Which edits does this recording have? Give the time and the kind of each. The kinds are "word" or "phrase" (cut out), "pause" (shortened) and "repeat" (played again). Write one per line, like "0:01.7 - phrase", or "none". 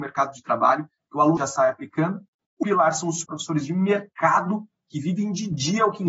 0:01.4 - phrase
0:02.6 - word
0:03.2 - word